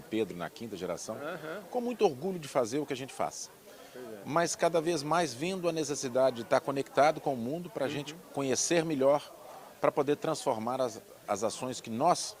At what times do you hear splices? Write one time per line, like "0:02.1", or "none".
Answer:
none